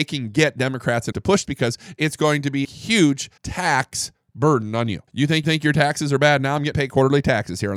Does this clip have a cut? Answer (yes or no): yes